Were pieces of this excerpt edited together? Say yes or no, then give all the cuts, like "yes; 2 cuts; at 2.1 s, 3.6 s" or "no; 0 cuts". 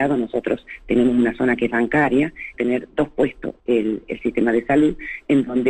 yes; 2 cuts; at 2.5 s, 3.6 s